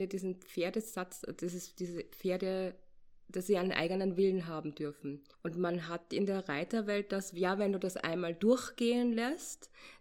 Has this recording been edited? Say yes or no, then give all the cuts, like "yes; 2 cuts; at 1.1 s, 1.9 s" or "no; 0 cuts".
yes; 1 cut; at 5.3 s